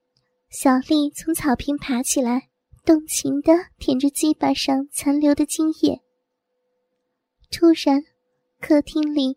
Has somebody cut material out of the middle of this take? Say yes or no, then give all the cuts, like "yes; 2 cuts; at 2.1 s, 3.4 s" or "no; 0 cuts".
yes; 2 cuts; at 2.6 s, 3.7 s